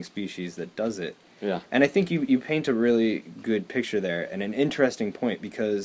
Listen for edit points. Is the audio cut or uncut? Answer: uncut